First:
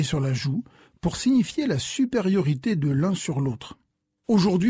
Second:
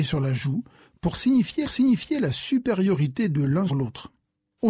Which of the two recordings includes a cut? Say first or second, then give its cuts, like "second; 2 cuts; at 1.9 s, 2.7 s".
second; 2 cuts; at 1.6 s, 3.7 s